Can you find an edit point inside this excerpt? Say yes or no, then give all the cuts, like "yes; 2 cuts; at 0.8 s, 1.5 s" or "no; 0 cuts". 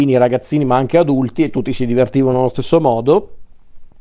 no; 0 cuts